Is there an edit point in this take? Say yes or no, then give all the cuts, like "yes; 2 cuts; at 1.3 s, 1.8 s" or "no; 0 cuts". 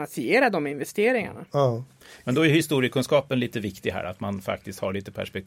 no; 0 cuts